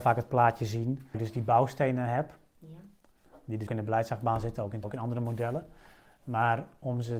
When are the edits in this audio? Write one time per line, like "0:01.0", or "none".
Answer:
0:01.1
0:03.7
0:04.8